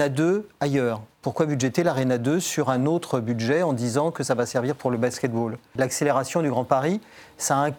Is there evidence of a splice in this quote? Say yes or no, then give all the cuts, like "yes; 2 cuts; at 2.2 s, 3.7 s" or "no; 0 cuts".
no; 0 cuts